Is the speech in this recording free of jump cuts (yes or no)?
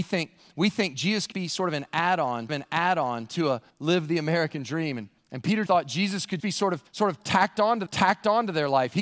no